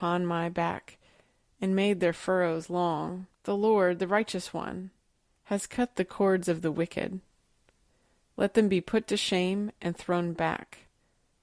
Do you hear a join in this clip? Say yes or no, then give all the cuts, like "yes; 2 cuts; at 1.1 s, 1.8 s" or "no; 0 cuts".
yes; 1 cut; at 3.3 s